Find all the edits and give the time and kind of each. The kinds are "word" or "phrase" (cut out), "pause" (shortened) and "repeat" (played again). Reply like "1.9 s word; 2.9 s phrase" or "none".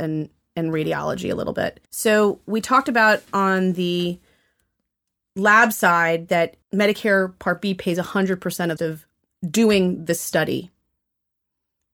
1.9 s pause; 6.6 s pause; 8.8 s phrase